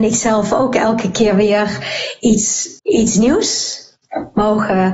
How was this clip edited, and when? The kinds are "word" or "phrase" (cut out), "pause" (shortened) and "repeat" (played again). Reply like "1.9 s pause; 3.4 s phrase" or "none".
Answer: 2.8 s pause